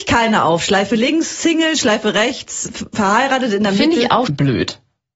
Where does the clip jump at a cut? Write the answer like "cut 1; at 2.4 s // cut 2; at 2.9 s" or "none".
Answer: cut 1; at 4.2 s